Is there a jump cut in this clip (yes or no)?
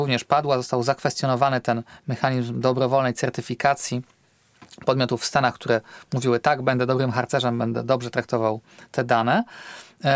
no